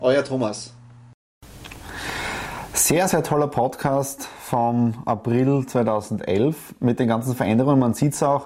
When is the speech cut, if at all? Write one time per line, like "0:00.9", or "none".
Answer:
none